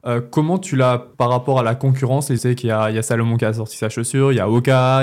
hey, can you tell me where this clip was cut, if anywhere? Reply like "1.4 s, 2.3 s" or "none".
1.1 s, 2.4 s